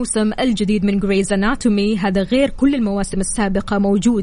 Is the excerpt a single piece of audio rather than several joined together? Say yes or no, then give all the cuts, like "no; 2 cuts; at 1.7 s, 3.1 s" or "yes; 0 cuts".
yes; 0 cuts